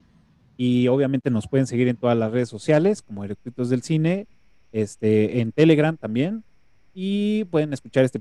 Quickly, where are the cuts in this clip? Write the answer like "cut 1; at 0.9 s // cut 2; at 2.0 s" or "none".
none

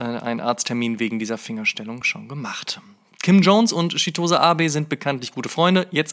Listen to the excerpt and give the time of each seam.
none

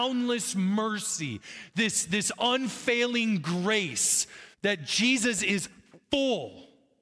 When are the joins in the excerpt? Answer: cut 1; at 4.5 s // cut 2; at 6.0 s

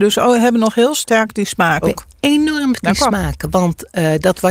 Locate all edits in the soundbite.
cut 1; at 1.8 s // cut 2; at 2.7 s

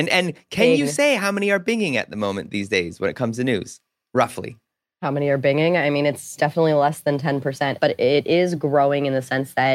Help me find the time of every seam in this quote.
none

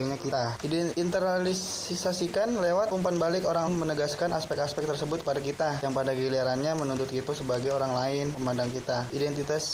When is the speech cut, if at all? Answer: cut 1; at 2.9 s // cut 2; at 3.7 s // cut 3; at 7.3 s

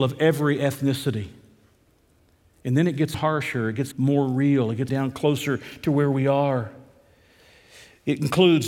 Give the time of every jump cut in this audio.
cut 1; at 3.1 s // cut 2; at 3.9 s // cut 3; at 4.9 s

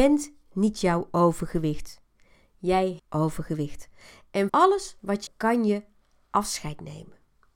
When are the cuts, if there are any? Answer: cut 1; at 3.0 s // cut 2; at 4.5 s // cut 3; at 5.3 s

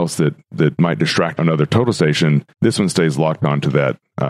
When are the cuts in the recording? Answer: cut 1; at 1.4 s // cut 2; at 2.5 s

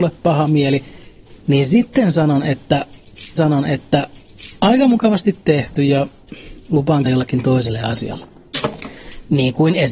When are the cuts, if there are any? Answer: cut 1; at 1.4 s // cut 2; at 3.4 s // cut 3; at 7.1 s

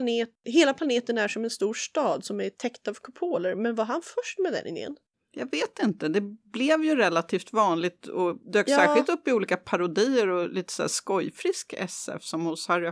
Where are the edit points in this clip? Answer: cut 1; at 8.4 s

